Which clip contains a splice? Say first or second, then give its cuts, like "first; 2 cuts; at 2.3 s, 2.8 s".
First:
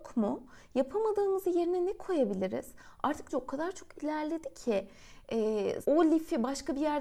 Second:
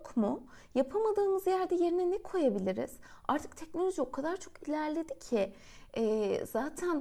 first; 3 cuts; at 1.4 s, 3.3 s, 5.8 s